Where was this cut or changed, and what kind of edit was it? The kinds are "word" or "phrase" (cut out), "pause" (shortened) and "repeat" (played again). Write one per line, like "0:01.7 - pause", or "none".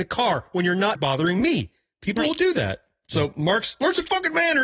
0:01.0 - word